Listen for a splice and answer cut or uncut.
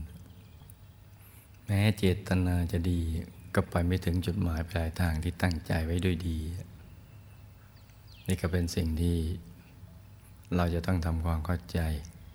uncut